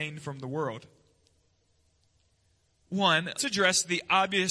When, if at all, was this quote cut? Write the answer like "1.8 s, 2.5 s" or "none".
3.4 s